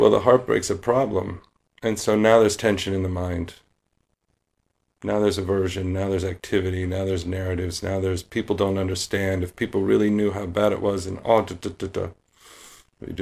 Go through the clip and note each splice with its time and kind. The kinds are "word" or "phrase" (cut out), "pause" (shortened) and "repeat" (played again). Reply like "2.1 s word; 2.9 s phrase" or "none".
none